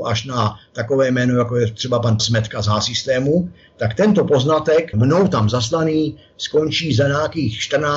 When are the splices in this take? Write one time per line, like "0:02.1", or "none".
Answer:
0:02.2
0:04.9